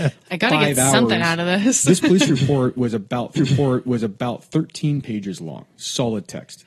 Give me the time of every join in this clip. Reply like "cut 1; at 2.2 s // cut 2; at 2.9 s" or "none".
cut 1; at 3.4 s